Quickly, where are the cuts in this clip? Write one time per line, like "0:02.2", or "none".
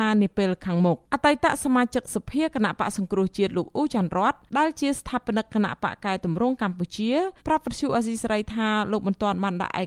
0:01.0
0:04.5
0:07.4